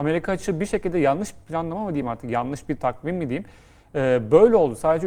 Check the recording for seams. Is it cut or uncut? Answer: uncut